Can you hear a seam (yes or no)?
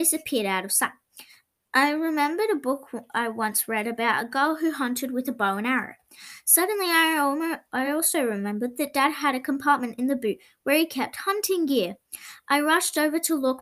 no